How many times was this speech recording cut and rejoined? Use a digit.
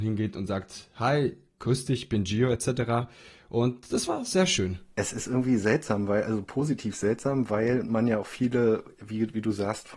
0